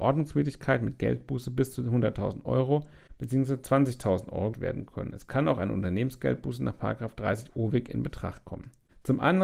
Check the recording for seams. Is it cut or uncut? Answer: cut